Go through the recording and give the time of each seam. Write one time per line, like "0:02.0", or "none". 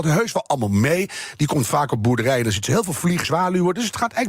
0:03.2